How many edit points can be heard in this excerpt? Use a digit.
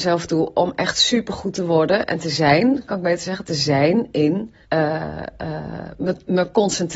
1